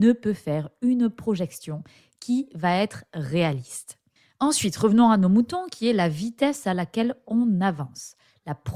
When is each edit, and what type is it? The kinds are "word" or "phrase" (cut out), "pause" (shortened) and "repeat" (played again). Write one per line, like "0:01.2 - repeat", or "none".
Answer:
none